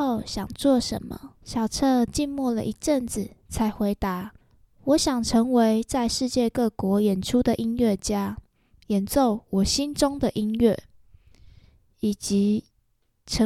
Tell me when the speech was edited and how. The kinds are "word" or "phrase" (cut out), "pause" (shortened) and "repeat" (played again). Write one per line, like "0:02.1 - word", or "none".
0:01.4 - pause
0:04.4 - pause